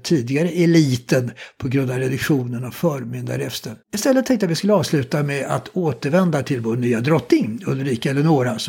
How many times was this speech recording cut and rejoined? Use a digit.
1